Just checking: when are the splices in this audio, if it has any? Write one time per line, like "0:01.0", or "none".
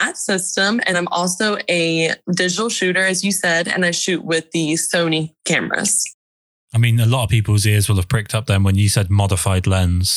0:00.9